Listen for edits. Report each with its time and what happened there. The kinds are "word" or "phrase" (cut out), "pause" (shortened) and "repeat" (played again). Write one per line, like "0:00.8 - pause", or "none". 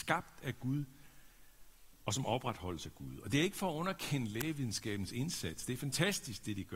none

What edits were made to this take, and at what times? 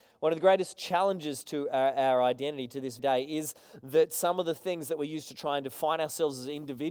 0:03.0 - word

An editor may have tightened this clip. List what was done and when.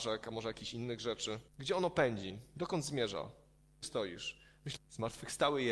0:01.5 - pause
0:03.8 - phrase
0:04.8 - phrase

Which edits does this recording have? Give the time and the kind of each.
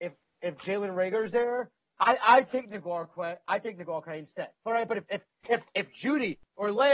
0:04.5 - pause

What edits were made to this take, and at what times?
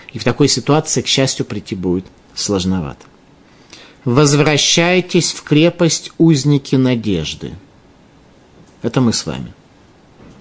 none

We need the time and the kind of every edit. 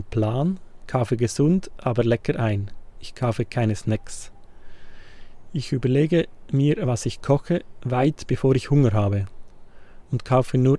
none

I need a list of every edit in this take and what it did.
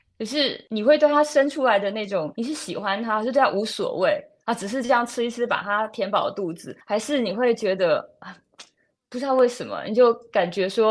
0:06.8 - pause

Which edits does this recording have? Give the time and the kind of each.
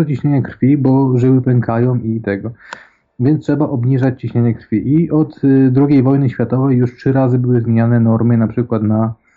none

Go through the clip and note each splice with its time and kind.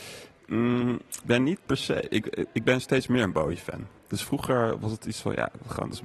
0:01.2 - word

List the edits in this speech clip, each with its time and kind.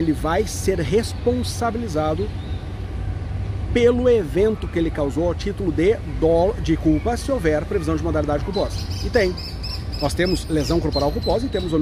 none

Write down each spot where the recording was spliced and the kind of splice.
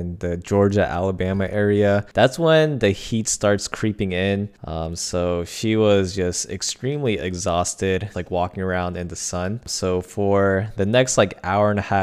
0:08.1 - word

